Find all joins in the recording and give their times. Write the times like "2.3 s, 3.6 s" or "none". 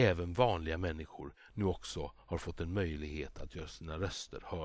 none